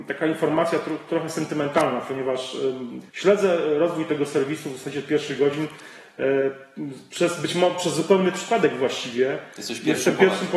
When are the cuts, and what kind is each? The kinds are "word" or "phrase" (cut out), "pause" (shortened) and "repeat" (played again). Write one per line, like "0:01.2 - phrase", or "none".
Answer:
0:03.1 - pause